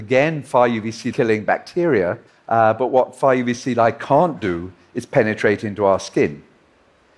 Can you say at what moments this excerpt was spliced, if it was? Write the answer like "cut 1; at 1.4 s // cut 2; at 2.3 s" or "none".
cut 1; at 1.1 s // cut 2; at 2.3 s